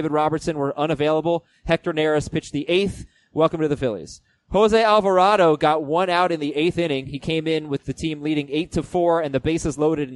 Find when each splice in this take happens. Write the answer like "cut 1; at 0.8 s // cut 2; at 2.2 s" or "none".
none